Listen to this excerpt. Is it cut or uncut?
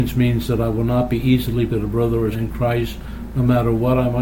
cut